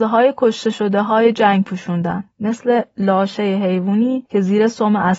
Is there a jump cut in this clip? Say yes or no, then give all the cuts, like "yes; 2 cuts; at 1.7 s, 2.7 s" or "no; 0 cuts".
yes; 1 cut; at 2.3 s